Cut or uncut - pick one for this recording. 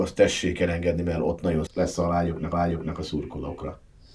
cut